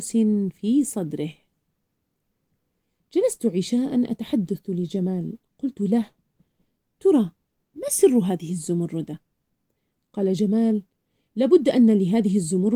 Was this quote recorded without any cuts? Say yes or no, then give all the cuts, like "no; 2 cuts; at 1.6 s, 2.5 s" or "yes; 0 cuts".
yes; 0 cuts